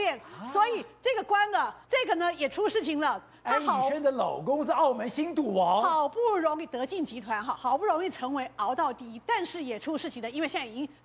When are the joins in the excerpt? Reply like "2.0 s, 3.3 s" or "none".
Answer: 1.8 s